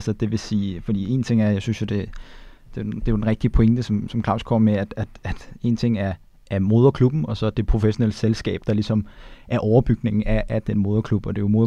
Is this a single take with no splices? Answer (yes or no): yes